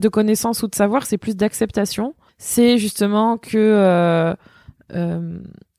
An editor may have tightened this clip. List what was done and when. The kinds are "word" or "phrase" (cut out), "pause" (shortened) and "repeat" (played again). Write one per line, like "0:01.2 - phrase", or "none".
0:02.3 - pause